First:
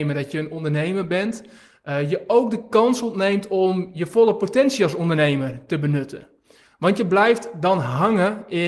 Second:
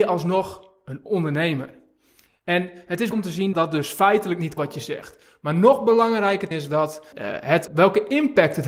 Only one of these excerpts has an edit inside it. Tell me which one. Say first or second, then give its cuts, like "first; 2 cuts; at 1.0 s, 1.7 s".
second; 6 cuts; at 3.1 s, 3.5 s, 4.6 s, 6.5 s, 7.1 s, 7.7 s